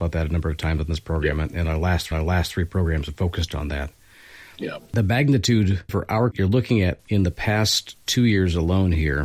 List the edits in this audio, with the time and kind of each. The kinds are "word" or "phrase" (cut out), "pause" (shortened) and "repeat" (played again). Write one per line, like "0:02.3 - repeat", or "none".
0:02.1 - repeat
0:04.9 - pause
0:05.9 - word
0:06.3 - word

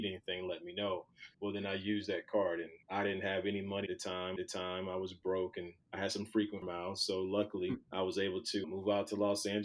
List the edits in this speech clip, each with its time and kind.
0:01.3 - pause
0:02.8 - pause
0:03.9 - word
0:04.4 - repeat
0:05.8 - pause
0:06.6 - word
0:07.8 - pause
0:08.6 - word

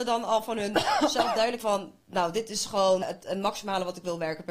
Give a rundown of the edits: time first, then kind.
0:01.6 - word
0:03.0 - word

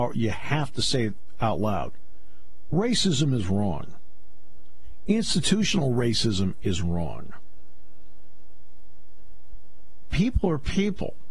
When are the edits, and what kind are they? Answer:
none

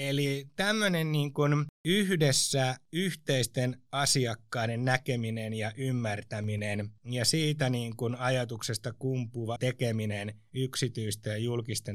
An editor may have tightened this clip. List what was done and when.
0:01.7 - pause
0:09.6 - word

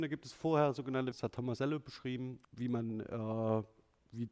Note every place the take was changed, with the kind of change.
0:01.1 - word
0:02.4 - word

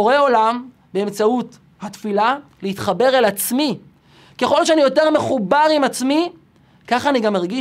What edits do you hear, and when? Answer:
none

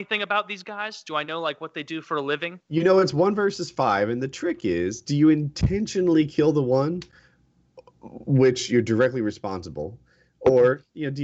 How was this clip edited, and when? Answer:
0:02.6 - pause

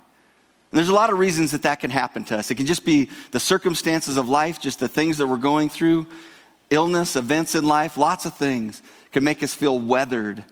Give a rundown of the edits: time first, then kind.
none

